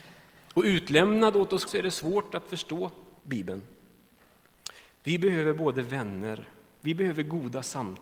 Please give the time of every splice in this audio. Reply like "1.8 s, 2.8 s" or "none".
1.7 s, 3.2 s